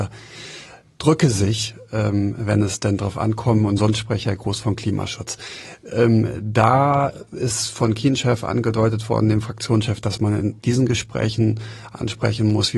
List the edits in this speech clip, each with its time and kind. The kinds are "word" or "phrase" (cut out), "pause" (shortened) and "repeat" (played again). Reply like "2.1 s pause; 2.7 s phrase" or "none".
10.6 s pause